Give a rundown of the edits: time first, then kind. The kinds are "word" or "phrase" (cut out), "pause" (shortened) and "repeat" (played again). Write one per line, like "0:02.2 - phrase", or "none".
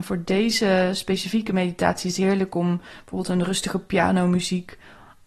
none

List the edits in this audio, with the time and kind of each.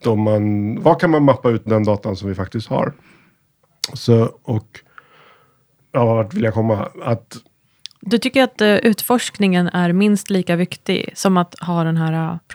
0:01.7 - phrase
0:05.8 - word

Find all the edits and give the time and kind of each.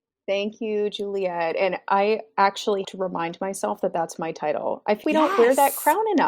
0:02.8 - word
0:05.0 - word

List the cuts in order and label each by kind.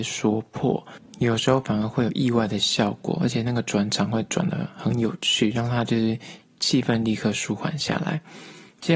none

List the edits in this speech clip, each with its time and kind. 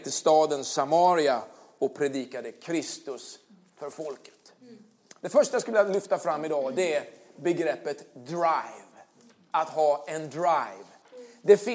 none

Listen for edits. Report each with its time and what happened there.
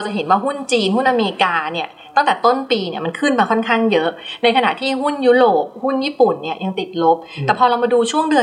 none

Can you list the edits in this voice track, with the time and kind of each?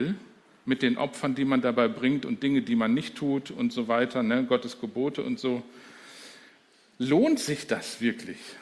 none

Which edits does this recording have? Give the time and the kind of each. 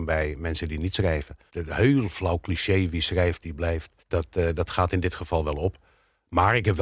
0:01.5 - pause
0:04.0 - pause

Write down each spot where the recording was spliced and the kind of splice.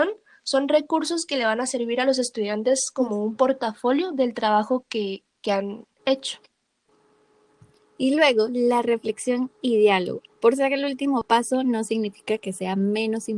0:05.9 - pause
0:10.3 - pause

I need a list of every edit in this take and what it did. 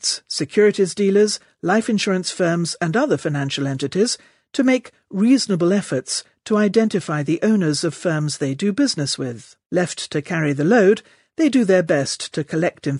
0:09.6 - pause

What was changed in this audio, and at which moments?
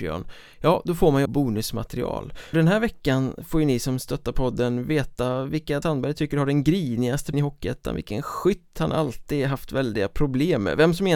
0:01.3 - word
0:02.5 - word
0:05.8 - word
0:07.3 - word

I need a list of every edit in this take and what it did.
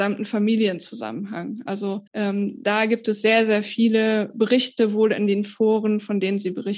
0:02.1 - pause

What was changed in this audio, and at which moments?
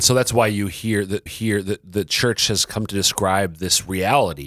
0:01.3 - repeat

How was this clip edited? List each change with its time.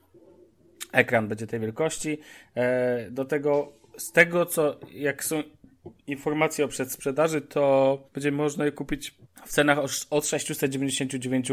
0:08.1 - pause
0:09.2 - pause

